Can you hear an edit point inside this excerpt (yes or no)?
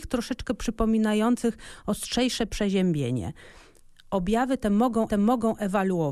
yes